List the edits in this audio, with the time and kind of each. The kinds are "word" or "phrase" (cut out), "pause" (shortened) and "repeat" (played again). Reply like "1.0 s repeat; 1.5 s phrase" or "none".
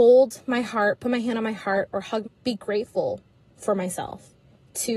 2.2 s phrase